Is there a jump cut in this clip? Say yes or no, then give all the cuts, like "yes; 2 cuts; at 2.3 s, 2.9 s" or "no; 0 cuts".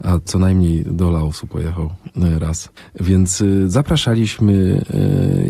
yes; 1 cut; at 2.8 s